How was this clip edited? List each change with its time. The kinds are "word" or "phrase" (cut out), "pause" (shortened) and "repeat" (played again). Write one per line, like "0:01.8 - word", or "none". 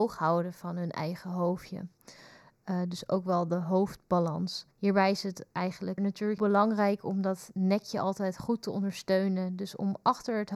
0:04.7 - pause
0:06.0 - phrase
0:06.4 - word